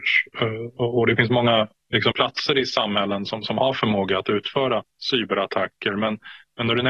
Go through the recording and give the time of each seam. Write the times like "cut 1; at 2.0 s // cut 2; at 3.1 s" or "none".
cut 1; at 2.1 s // cut 2; at 4.9 s